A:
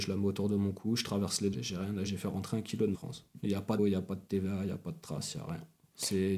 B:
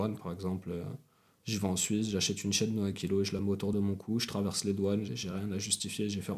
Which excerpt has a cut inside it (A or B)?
A